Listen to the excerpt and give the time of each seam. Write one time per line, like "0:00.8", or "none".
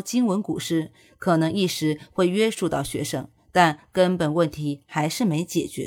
none

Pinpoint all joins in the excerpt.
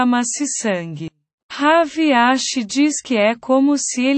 none

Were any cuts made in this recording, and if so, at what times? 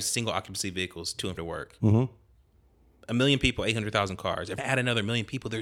0:01.4
0:04.6

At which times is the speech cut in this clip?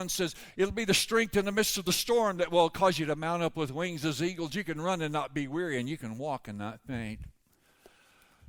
none

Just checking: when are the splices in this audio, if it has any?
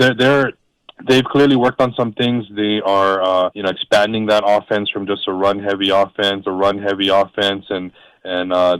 0:03.5
0:06.4

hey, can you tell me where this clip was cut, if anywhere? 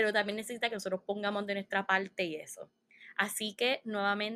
none

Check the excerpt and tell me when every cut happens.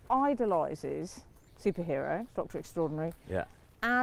0:01.5
0:02.3

